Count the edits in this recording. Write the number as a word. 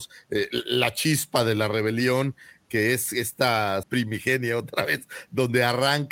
one